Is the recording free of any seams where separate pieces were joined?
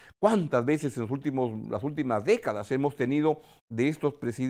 yes; 0 cuts

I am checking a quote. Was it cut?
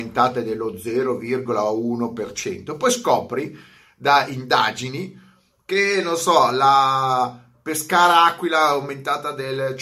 no; 0 cuts

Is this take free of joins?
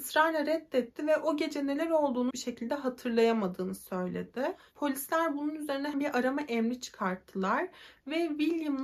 no; 2 cuts; at 2.3 s, 5.9 s

